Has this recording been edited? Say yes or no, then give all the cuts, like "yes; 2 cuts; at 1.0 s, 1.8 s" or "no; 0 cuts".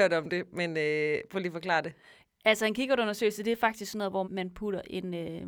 yes; 1 cut; at 4.2 s